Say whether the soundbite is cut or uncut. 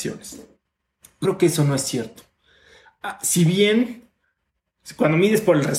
cut